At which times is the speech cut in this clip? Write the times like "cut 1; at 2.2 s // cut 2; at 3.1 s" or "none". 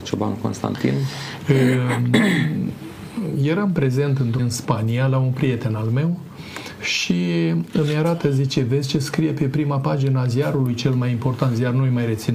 cut 1; at 4.4 s